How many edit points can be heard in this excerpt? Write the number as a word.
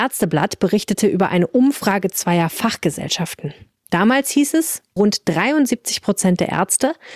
one